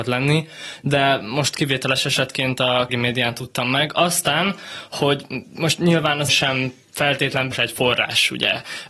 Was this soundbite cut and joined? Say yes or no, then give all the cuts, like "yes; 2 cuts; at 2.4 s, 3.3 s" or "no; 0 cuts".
yes; 3 cuts; at 2.9 s, 6.3 s, 7.5 s